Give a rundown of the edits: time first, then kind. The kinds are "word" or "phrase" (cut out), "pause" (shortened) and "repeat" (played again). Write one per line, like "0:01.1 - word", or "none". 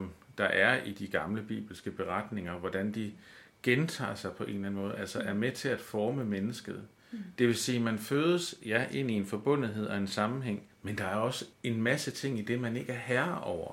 0:10.7 - pause
0:11.5 - pause